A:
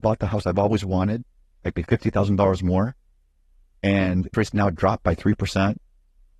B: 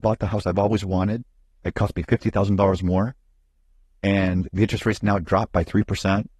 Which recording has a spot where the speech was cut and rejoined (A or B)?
A